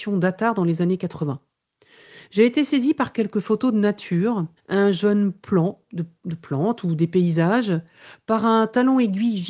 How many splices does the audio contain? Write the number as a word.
one